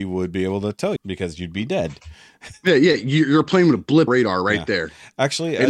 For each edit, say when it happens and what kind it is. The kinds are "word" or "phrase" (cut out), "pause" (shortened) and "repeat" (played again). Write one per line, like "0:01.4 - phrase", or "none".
0:01.0 - word
0:04.1 - phrase